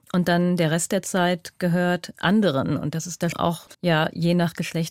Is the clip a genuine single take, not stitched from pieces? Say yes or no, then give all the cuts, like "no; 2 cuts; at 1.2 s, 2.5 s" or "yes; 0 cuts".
no; 2 cuts; at 3.3 s, 3.7 s